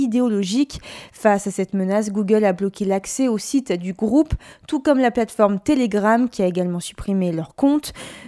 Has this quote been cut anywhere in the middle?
no; 0 cuts

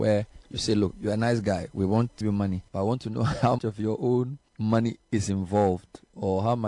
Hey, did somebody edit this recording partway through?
yes; 5 cuts; at 0.9 s, 2.2 s, 2.7 s, 3.6 s, 4.5 s

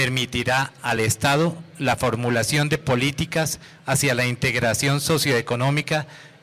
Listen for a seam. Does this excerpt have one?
no; 0 cuts

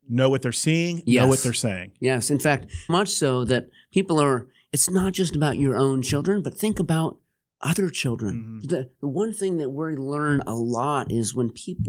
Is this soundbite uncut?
no; 1 cut; at 2.9 s

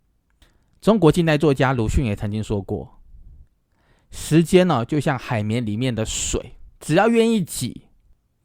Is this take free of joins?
no; 2 cuts; at 3.4 s, 6.7 s

